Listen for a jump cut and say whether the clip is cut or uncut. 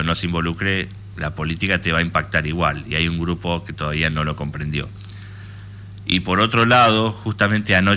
uncut